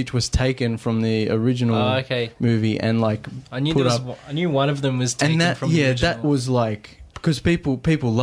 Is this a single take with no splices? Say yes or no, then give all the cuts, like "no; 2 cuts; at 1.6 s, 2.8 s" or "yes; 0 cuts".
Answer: no; 2 cuts; at 3.5 s, 6.2 s